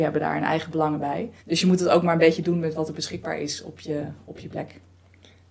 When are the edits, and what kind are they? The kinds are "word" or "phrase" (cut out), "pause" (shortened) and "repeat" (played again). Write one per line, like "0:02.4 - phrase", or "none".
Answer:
0:01.4 - pause